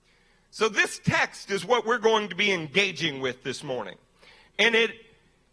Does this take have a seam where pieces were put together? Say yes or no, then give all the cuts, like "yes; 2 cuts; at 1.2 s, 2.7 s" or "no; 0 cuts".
no; 0 cuts